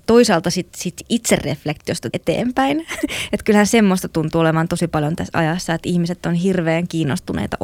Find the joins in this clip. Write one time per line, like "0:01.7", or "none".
0:02.1